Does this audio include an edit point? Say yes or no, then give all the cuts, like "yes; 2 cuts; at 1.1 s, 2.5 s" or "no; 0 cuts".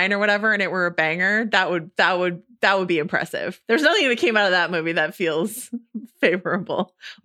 no; 0 cuts